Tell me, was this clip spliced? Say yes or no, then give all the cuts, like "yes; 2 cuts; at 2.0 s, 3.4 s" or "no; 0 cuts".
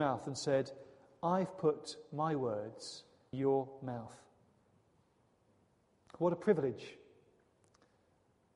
yes; 1 cut; at 3.3 s